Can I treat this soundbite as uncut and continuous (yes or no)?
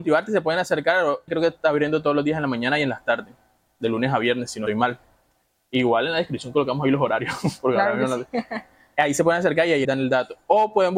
no